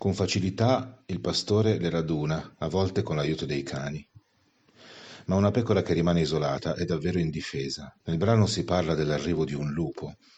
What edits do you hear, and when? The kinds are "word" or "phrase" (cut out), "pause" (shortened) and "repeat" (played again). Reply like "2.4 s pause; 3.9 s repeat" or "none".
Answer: 8.0 s pause